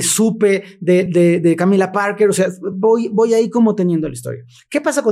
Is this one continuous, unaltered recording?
yes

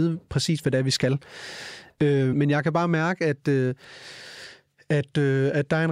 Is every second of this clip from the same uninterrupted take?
no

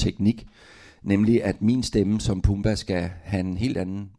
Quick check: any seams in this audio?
no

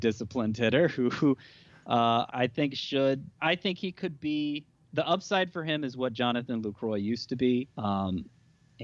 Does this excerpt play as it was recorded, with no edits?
no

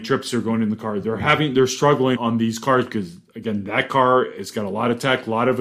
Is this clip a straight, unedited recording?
no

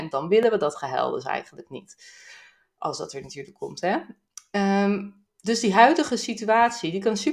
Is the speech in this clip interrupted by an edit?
no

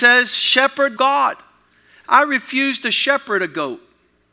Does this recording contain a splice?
yes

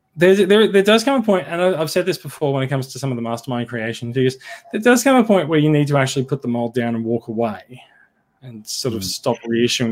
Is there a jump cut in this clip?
no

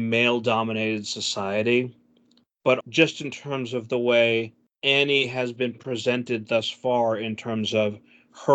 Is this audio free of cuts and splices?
no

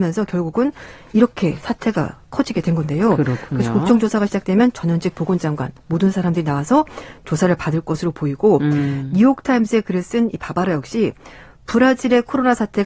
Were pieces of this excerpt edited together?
no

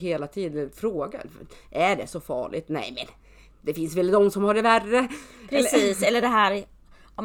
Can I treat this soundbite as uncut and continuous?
yes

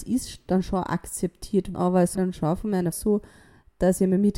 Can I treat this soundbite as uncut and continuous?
no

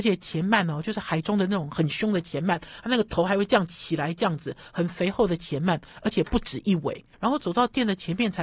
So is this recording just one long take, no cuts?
no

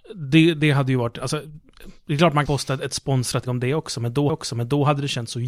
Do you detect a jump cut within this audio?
yes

